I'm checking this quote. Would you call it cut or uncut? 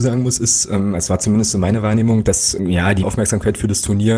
cut